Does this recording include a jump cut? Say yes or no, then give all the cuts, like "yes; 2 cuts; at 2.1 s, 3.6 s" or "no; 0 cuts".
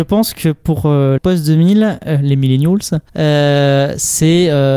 yes; 2 cuts; at 1.2 s, 3.1 s